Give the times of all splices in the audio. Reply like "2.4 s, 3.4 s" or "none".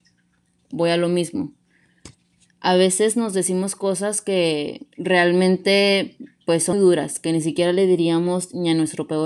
4.9 s, 6.7 s